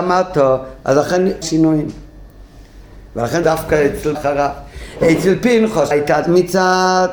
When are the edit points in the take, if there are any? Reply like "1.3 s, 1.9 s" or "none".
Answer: 1.4 s, 3.4 s, 4.1 s, 5.9 s, 6.2 s